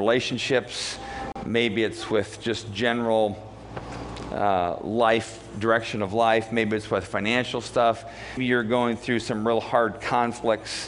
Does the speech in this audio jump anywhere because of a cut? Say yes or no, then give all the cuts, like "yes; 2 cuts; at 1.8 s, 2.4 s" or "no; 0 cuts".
yes; 1 cut; at 8.4 s